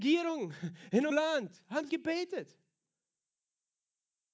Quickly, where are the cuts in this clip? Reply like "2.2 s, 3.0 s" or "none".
1.1 s, 1.9 s